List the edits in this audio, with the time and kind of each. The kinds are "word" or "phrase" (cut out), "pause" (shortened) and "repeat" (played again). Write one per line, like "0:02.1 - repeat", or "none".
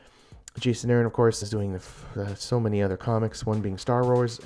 0:01.4 - word